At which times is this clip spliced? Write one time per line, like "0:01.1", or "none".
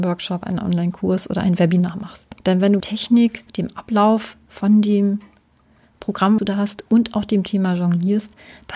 0:02.4
0:02.8
0:03.5
0:06.4